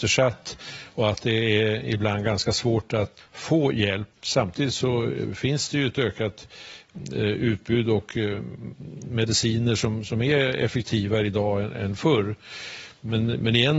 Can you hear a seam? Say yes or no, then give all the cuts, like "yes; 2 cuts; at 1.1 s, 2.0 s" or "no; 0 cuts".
yes; 2 cuts; at 3.2 s, 4.1 s